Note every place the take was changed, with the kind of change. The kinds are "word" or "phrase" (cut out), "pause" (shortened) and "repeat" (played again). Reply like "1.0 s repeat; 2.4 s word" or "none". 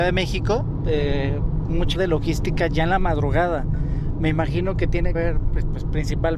1.9 s word; 5.1 s word

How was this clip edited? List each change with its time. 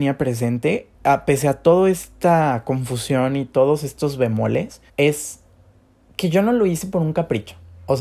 0.9 s pause; 4.9 s pause

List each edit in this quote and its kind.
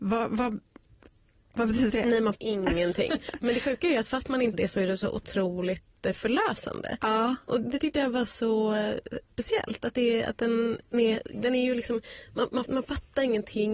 2.3 s word; 4.5 s word; 7.6 s word; 9.3 s word; 10.9 s word; 12.7 s word

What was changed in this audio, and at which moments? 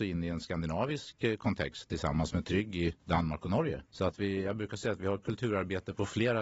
none

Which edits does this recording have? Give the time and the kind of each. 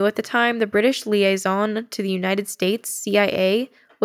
none

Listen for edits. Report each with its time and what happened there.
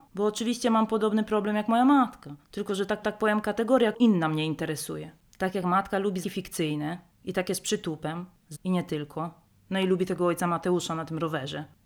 3.0 s repeat; 3.9 s word; 6.2 s word; 8.5 s word

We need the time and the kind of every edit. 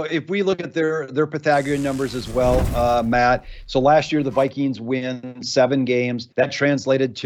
6.3 s pause

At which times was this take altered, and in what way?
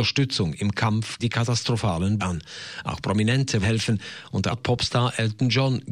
1.2 s word; 2.2 s word; 3.6 s word; 4.5 s word

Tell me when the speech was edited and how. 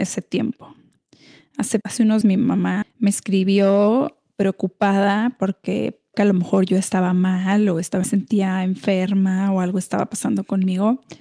1.8 s word; 2.2 s word; 2.8 s word; 6.1 s word; 8.0 s word

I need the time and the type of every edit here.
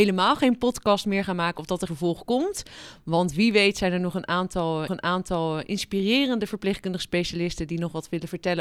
1.9 s word; 4.9 s repeat

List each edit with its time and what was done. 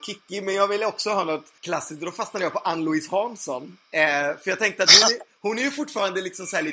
1.6 s pause; 3.8 s pause

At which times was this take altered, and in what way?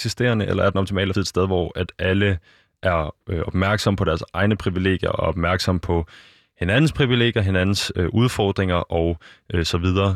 1.1 s word

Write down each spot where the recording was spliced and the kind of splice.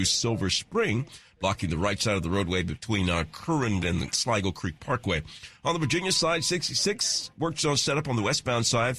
3.8 s word

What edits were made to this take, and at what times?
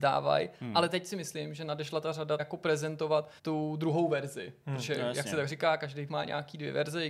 2.4 s word; 3.4 s pause; 6.1 s word

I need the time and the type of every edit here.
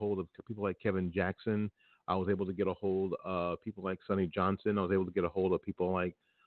none

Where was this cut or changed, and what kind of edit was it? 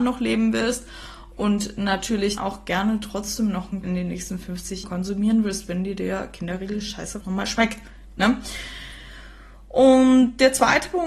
2.4 s word; 3.8 s word; 4.8 s word; 7.2 s word

